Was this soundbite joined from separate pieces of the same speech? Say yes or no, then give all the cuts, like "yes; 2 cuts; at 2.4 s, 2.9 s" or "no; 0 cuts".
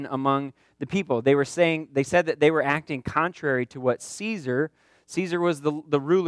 no; 0 cuts